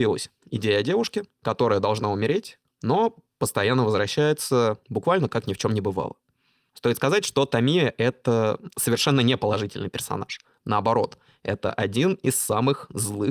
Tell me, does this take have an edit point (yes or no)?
no